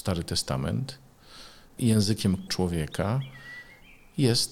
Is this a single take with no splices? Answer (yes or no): no